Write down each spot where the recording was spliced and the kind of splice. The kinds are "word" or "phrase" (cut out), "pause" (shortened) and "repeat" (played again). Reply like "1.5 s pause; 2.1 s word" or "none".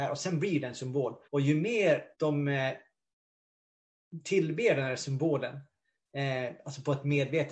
1.2 s pause; 2.1 s pause